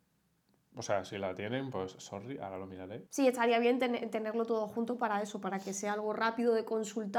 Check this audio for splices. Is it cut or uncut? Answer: uncut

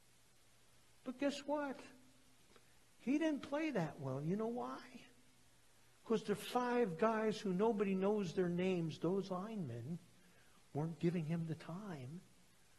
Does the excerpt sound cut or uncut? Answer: uncut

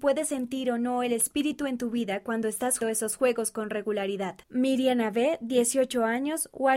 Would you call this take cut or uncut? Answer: cut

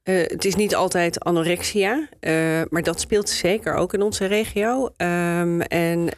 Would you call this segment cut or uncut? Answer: uncut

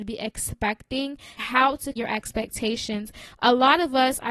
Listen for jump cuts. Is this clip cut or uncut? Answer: cut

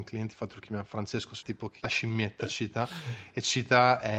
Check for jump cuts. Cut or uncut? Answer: cut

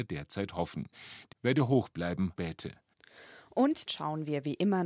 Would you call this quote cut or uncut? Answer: cut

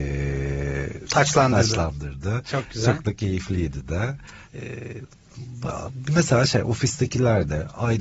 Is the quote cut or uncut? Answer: cut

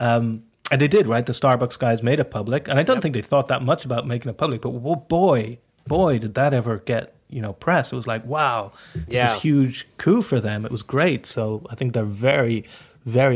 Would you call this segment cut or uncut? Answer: uncut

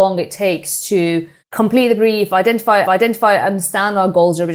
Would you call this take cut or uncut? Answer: cut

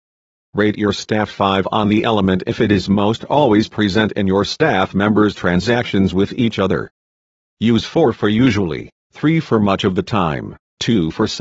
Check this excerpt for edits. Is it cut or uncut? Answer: uncut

